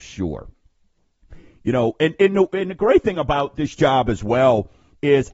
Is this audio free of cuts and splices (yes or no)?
yes